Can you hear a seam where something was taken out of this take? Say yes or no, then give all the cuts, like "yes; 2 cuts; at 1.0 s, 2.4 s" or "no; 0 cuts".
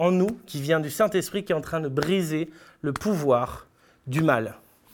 no; 0 cuts